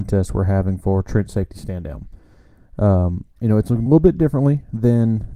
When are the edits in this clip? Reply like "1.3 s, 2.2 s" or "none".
3.3 s, 3.9 s